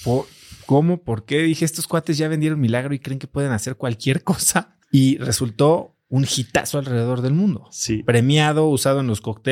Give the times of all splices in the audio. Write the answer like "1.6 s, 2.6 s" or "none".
4.8 s